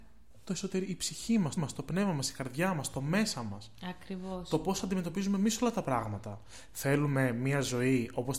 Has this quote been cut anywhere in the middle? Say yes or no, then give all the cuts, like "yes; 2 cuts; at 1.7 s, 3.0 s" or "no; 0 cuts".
yes; 1 cut; at 1.6 s